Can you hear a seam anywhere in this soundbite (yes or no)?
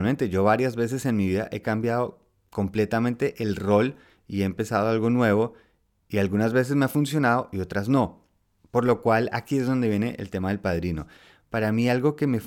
no